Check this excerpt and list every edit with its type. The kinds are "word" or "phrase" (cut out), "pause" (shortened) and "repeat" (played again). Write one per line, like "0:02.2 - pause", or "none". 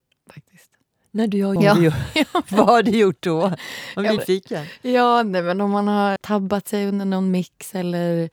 0:01.6 - phrase
0:04.2 - word
0:06.2 - word